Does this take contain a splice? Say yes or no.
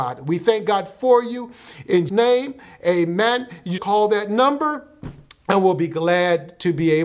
yes